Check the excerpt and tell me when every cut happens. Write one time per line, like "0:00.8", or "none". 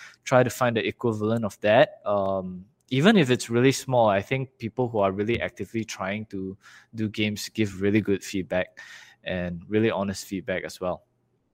none